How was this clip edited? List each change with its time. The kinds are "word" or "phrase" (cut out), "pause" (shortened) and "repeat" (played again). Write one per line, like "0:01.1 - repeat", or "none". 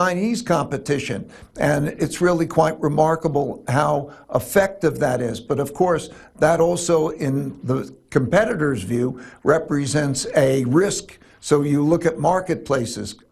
none